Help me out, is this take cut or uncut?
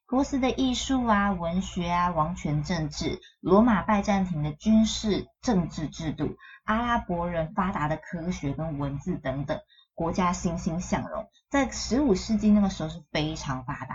uncut